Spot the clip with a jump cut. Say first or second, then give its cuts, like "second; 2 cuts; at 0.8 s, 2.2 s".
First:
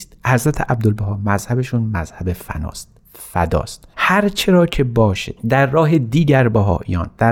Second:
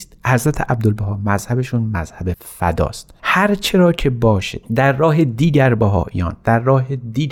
second; 1 cut; at 2.3 s